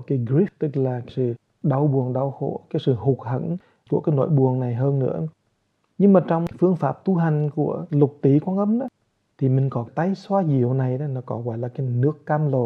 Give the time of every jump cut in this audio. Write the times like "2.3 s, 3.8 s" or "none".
none